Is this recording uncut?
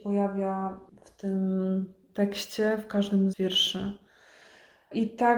no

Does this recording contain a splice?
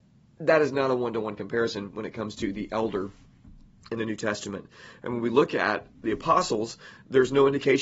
no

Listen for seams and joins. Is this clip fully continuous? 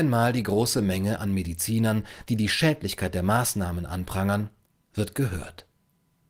yes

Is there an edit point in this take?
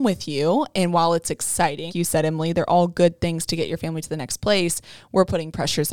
yes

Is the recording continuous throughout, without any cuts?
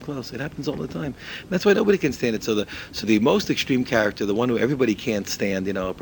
no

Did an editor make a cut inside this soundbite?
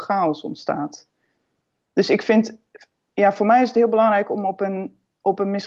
no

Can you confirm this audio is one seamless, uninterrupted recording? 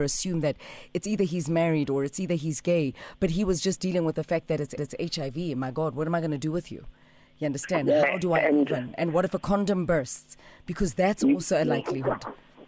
no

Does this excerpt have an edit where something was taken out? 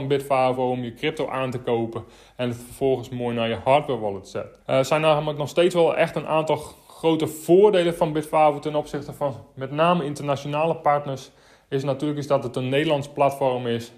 yes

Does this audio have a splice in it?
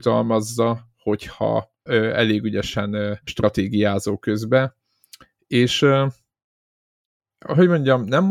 yes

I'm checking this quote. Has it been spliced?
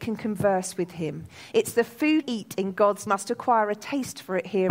yes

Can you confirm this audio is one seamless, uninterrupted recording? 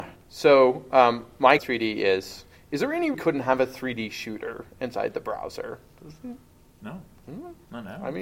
no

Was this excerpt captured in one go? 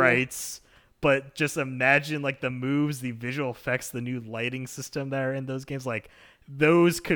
yes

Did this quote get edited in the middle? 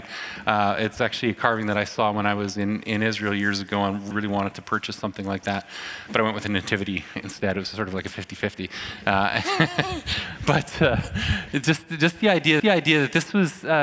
yes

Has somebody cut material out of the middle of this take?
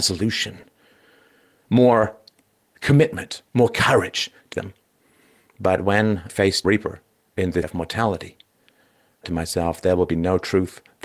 yes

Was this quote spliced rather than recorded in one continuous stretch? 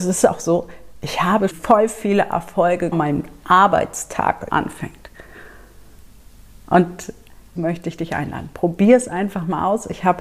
yes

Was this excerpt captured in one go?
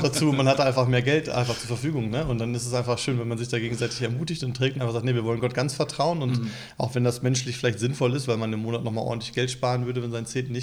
yes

